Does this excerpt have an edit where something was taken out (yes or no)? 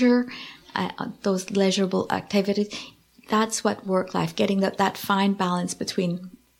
no